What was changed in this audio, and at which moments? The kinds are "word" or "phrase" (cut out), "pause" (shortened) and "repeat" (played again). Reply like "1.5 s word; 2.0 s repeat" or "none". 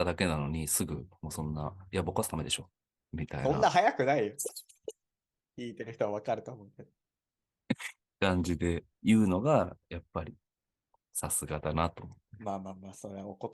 8.9 s pause